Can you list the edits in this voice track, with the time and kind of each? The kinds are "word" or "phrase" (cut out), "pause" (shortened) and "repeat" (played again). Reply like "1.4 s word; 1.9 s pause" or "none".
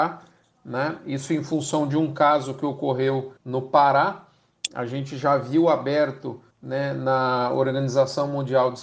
3.4 s pause; 6.5 s pause